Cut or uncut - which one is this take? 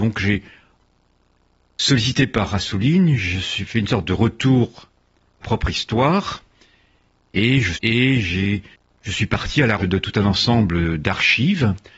cut